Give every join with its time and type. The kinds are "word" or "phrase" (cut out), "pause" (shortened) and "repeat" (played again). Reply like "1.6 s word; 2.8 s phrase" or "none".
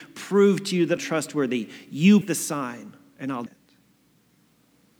1.0 s word; 2.2 s word; 3.5 s word